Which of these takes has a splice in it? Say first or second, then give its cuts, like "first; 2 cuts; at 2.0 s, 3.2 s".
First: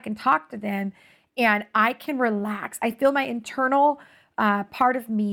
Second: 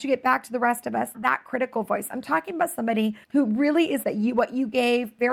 second; 3 cuts; at 1.1 s, 3.2 s, 4.0 s